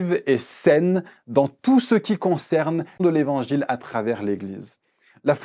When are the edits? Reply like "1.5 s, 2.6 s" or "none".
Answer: 3.0 s

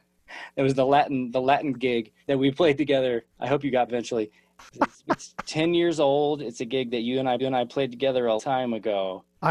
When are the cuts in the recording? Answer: 1.7 s, 2.2 s, 3.3 s, 3.9 s, 7.4 s, 8.4 s

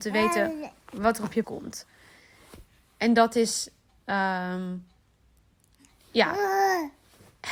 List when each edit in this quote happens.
1.4 s

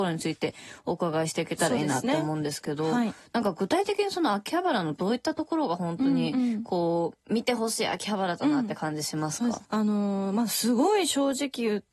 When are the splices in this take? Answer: 9.6 s

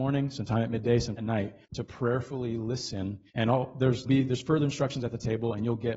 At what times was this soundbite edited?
1.2 s, 1.6 s, 3.3 s, 4.1 s

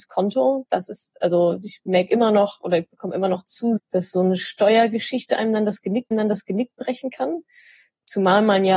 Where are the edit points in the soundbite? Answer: 3.8 s, 6.1 s

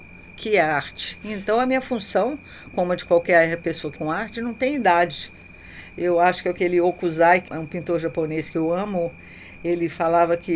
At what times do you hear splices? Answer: 4.0 s, 7.5 s

